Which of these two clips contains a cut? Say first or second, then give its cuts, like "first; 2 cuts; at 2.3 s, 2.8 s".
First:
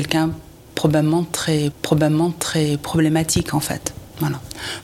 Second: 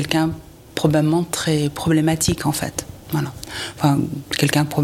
first; 1 cut; at 1.7 s